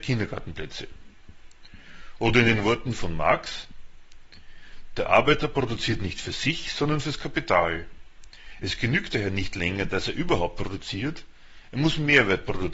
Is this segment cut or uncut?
uncut